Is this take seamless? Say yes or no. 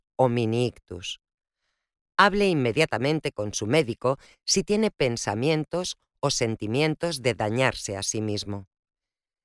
yes